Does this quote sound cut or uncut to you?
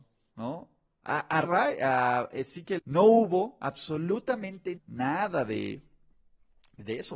cut